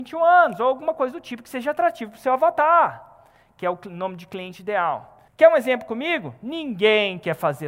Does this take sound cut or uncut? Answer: cut